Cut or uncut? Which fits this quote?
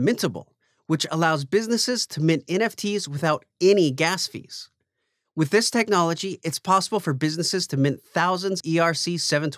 cut